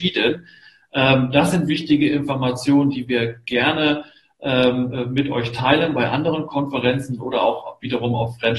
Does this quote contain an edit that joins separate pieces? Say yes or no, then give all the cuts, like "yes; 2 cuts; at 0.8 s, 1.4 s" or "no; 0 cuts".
no; 0 cuts